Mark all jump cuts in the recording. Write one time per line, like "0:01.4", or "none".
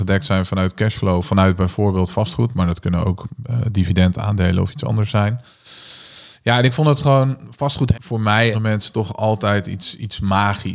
0:06.3
0:07.9
0:08.5